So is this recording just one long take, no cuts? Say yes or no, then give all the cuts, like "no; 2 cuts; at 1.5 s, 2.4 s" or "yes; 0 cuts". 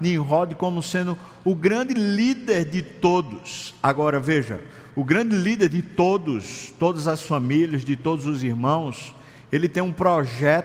yes; 0 cuts